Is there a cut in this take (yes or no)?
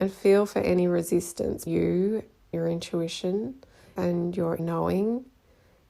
yes